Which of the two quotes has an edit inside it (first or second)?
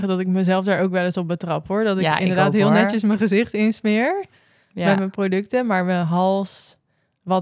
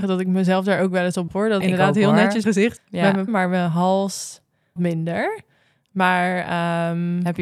second